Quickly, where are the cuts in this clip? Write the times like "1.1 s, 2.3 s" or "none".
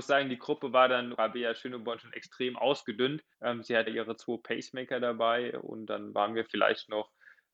1.1 s, 3.3 s, 3.9 s